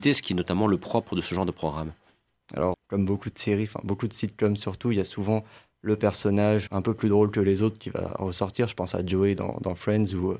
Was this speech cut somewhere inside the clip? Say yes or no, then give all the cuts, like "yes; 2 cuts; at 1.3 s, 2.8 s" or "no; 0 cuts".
yes; 2 cuts; at 2.7 s, 6.7 s